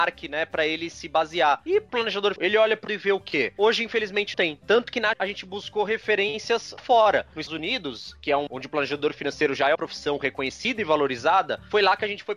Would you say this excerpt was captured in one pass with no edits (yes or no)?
no